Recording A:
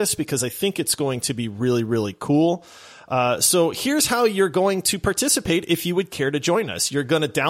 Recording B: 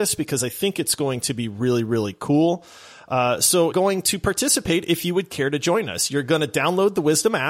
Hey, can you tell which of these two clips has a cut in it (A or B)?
B